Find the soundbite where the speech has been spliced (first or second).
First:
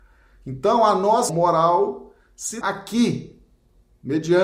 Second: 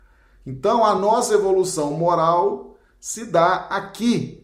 first